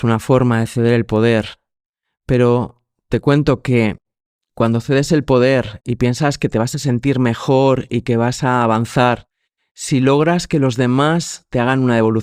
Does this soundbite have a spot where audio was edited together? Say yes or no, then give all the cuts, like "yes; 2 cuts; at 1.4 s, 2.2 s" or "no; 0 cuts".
no; 0 cuts